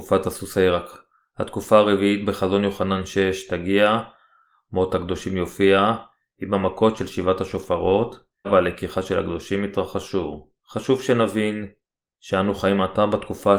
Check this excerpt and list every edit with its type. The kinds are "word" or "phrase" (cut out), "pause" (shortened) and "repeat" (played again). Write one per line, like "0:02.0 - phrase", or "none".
0:00.9 - word
0:08.4 - word
0:10.6 - pause